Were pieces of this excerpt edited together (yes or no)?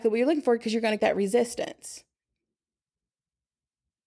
yes